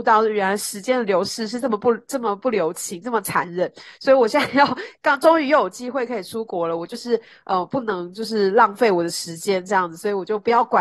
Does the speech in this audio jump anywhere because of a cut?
no; 0 cuts

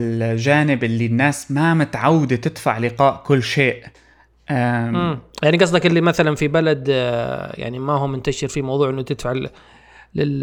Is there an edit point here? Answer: no; 0 cuts

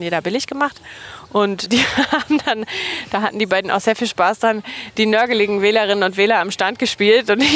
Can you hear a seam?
yes; 1 cut; at 1.7 s

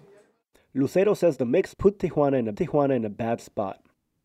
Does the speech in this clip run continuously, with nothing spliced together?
no; 2 cuts; at 1.7 s, 2.5 s

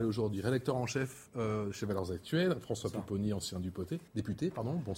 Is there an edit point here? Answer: yes; 1 cut; at 4.1 s

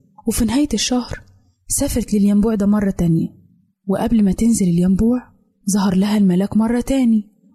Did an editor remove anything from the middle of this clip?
no; 0 cuts

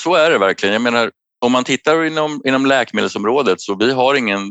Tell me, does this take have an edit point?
no; 0 cuts

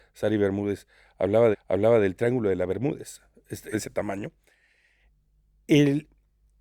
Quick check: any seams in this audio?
yes; 2 cuts; at 1.5 s, 3.7 s

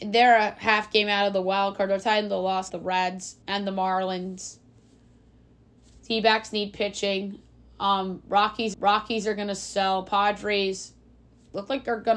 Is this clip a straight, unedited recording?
no; 3 cuts; at 2.7 s, 3.4 s, 8.7 s

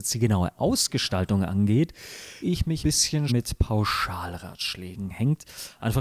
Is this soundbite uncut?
no; 3 cuts; at 2.4 s, 2.8 s, 3.3 s

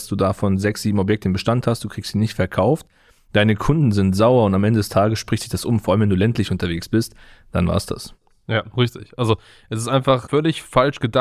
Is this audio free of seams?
yes; 0 cuts

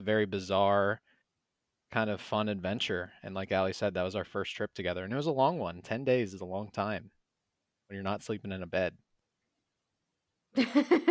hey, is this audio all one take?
yes; 0 cuts

